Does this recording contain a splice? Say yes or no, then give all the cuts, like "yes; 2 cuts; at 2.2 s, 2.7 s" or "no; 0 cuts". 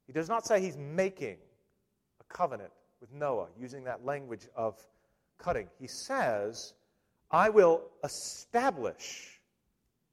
no; 0 cuts